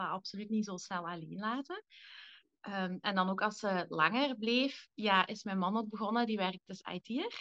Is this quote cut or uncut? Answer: cut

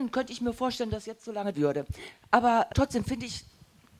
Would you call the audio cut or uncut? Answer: cut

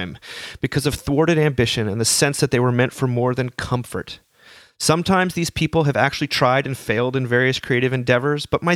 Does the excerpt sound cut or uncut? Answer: uncut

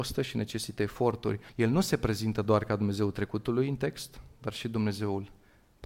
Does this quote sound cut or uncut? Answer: cut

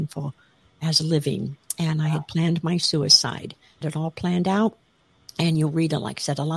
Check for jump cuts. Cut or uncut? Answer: cut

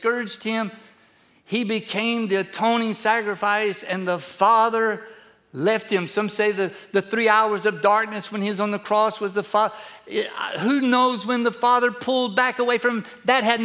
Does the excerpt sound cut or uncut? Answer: uncut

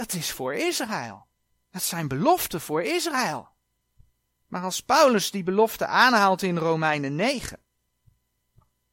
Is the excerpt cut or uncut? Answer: uncut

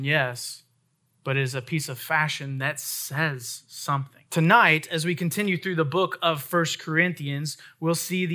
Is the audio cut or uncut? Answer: cut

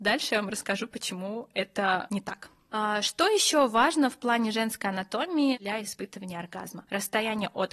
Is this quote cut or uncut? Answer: uncut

